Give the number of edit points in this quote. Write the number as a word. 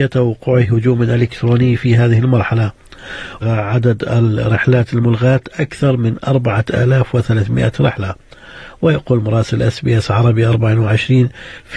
one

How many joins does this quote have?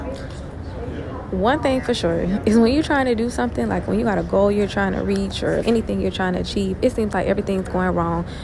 one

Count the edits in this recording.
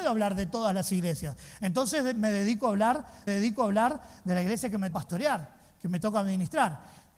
two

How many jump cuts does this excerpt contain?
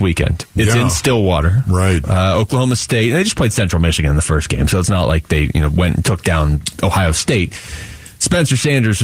zero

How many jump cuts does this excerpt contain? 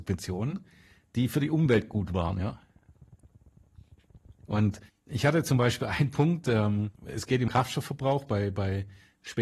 three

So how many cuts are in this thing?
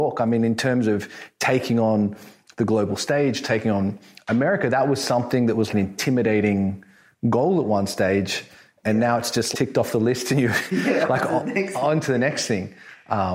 two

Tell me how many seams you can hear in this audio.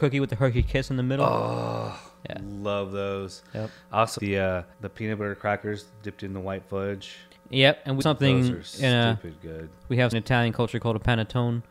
six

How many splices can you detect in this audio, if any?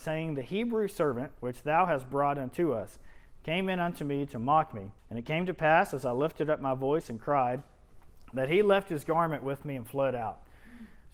one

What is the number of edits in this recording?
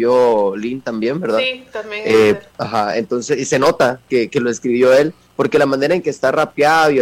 one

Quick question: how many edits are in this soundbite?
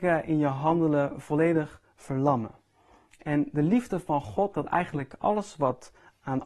one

